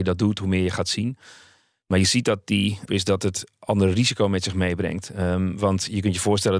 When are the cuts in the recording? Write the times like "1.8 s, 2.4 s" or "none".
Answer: 2.9 s